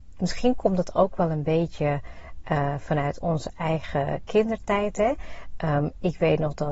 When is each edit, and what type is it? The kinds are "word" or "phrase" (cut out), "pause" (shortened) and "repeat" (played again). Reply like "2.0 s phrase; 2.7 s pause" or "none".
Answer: none

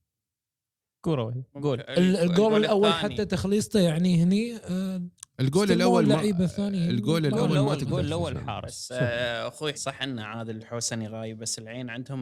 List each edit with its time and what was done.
1.5 s pause; 9.7 s word

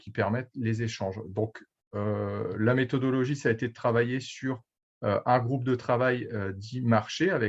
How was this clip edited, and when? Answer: none

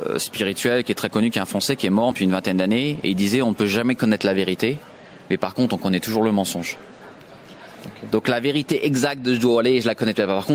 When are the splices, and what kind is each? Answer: 2.1 s word

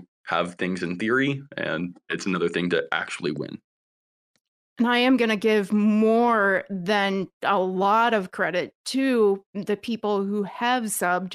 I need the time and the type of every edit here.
none

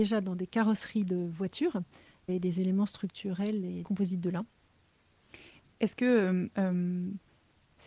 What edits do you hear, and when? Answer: 2.3 s word; 3.8 s word

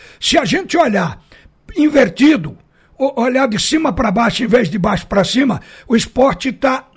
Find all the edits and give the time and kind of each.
none

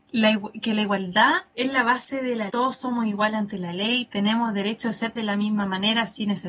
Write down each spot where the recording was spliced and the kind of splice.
1.5 s word; 2.5 s word; 5.2 s word

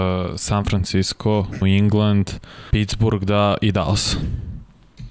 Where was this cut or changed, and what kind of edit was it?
1.6 s word; 2.7 s word

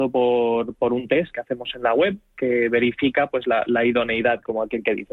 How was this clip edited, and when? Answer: none

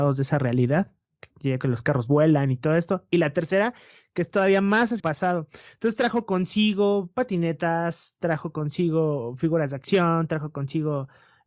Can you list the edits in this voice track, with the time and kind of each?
5.0 s word

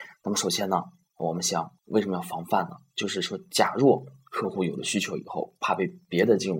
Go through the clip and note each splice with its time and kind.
1.8 s pause

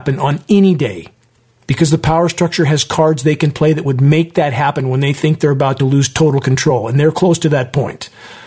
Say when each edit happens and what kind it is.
none

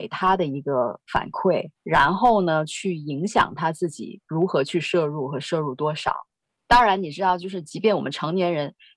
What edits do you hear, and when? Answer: 1.7 s pause; 6.4 s pause

